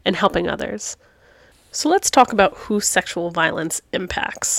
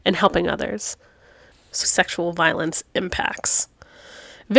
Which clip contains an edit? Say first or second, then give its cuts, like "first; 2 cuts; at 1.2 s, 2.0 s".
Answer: second; 1 cut; at 1.8 s